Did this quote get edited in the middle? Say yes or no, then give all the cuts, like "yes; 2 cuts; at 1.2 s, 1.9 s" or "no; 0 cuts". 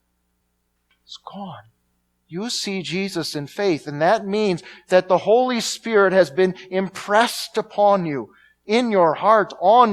no; 0 cuts